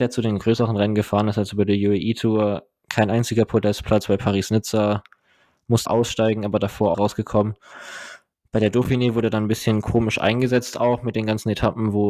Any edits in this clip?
yes; 2 cuts; at 5.9 s, 6.9 s

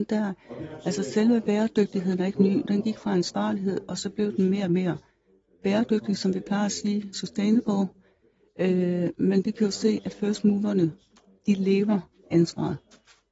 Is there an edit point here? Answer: no; 0 cuts

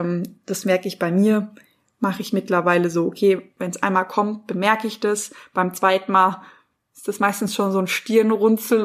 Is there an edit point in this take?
no; 0 cuts

